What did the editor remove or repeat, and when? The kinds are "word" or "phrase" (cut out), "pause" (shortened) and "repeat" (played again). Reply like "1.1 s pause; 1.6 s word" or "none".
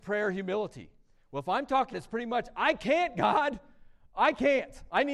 1.9 s phrase